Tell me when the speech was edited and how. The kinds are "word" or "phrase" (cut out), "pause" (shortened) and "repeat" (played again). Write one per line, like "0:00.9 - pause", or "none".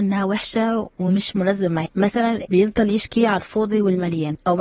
0:02.4 - word